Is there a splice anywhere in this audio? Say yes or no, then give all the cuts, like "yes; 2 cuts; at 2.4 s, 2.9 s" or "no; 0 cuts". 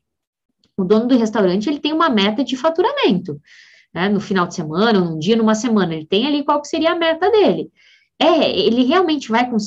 no; 0 cuts